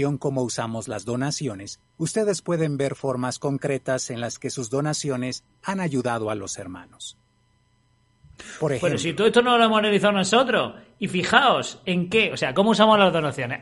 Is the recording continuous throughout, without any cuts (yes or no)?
yes